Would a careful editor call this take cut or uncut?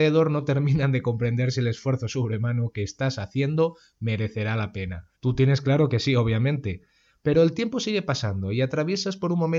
cut